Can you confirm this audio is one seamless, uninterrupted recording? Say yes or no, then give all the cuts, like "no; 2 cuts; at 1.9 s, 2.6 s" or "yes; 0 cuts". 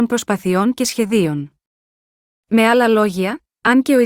yes; 0 cuts